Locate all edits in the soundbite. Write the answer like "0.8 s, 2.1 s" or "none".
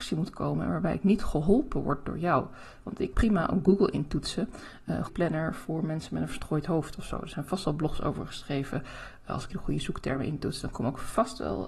3.1 s, 5.1 s, 9.5 s